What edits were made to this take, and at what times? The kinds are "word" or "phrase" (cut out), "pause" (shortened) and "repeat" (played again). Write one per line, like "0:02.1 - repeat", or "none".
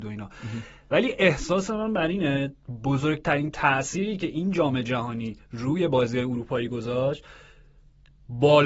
none